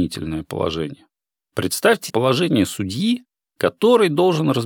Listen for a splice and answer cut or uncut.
cut